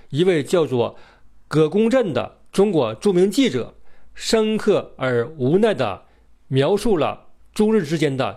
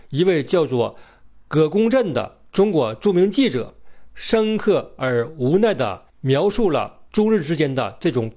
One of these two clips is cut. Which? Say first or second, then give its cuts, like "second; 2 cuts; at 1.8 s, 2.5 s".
second; 2 cuts; at 6.1 s, 7.1 s